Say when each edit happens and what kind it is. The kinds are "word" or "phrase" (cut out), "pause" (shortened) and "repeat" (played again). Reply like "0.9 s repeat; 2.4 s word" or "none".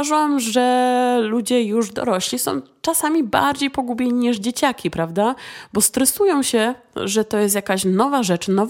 none